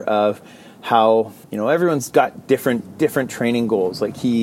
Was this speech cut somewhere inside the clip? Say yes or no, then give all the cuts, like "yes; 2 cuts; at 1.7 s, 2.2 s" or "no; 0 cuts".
yes; 1 cut; at 1.4 s